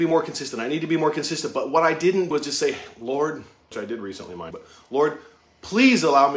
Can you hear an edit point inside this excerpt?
yes; 3 cuts; at 2.3 s, 3.7 s, 4.5 s

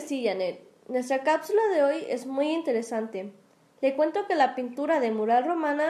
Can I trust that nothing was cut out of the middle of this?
yes; 0 cuts

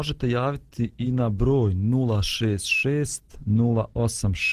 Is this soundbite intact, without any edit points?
yes; 0 cuts

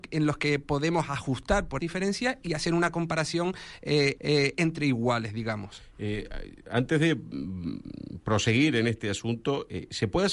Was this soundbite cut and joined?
yes; 2 cuts; at 1.8 s, 4.2 s

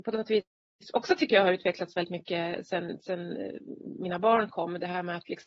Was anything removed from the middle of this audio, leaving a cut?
no; 0 cuts

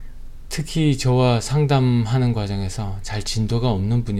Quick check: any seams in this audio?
no; 0 cuts

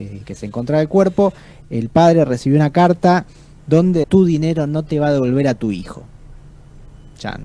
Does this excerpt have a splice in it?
yes; 1 cut; at 4.0 s

